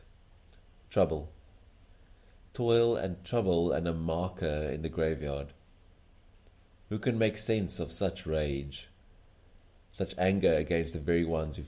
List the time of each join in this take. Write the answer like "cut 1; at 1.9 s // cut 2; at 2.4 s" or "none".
none